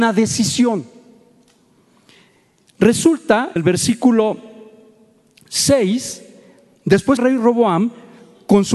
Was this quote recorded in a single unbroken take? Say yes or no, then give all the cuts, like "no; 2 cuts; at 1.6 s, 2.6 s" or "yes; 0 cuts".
no; 2 cuts; at 3.6 s, 7.2 s